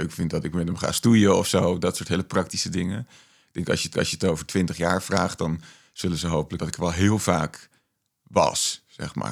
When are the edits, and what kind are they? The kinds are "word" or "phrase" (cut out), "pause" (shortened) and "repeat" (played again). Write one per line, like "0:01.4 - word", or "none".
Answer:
0:03.9 - repeat
0:06.6 - word